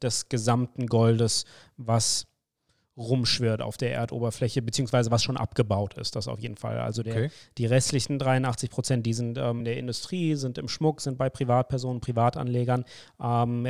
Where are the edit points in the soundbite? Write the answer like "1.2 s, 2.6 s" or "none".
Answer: 9.6 s